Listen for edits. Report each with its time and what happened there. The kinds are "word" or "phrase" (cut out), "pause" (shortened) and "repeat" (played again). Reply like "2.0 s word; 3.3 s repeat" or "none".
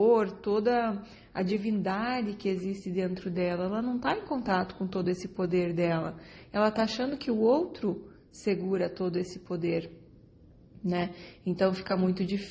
none

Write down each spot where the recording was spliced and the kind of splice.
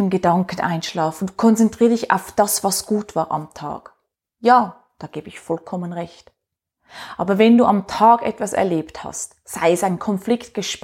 none

